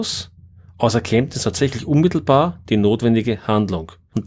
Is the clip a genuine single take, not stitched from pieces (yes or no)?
yes